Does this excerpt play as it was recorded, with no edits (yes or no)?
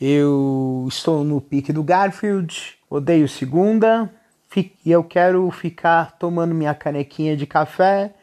no